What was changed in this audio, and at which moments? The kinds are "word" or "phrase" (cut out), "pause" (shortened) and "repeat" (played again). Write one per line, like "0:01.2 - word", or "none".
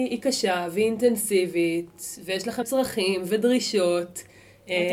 0:02.6 - word